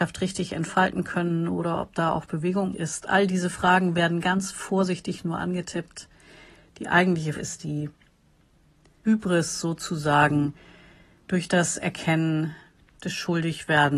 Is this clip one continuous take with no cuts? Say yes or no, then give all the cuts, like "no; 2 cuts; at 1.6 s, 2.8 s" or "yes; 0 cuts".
no; 3 cuts; at 2.7 s, 7.4 s, 9.0 s